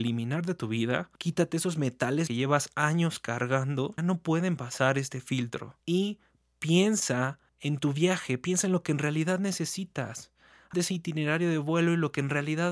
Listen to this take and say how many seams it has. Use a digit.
6